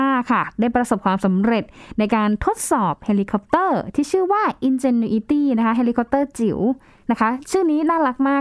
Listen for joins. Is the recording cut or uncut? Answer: uncut